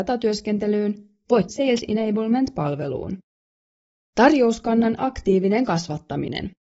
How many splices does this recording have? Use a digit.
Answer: 1